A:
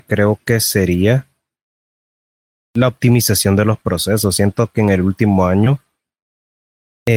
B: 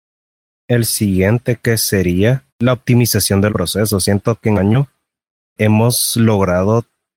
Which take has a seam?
B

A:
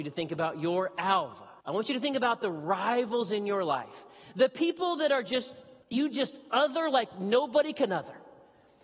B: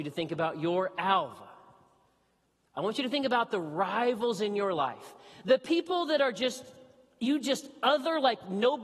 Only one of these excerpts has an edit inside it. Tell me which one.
A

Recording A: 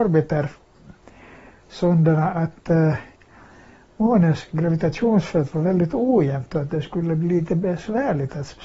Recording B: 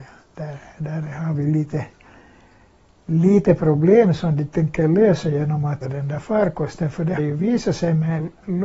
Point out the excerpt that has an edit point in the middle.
B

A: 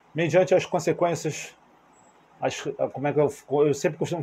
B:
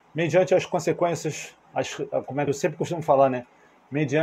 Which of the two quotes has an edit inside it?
B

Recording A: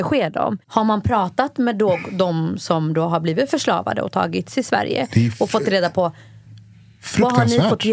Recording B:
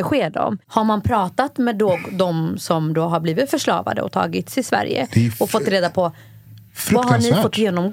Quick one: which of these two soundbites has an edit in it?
B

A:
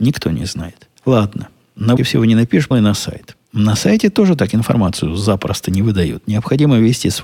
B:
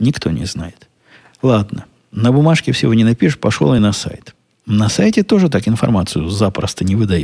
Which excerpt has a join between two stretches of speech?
A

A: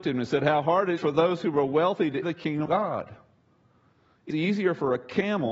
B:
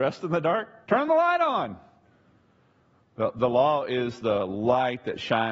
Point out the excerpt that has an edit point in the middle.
A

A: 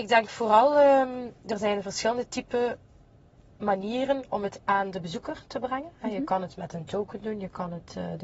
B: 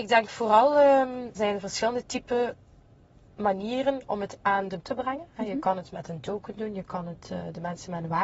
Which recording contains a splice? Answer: B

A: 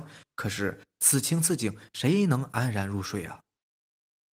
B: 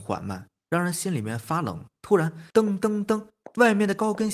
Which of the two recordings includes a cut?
B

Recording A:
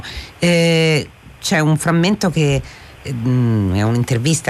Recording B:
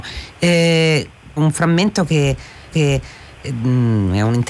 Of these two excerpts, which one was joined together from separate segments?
B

